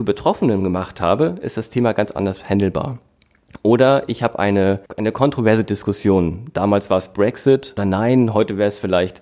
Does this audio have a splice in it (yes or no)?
yes